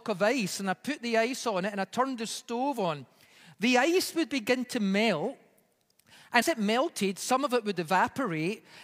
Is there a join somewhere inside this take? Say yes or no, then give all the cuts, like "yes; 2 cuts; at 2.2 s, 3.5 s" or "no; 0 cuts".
yes; 1 cut; at 6.4 s